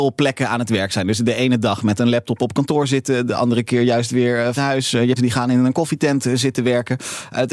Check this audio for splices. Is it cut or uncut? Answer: cut